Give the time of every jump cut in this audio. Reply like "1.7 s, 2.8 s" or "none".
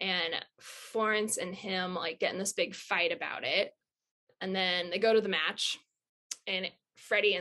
none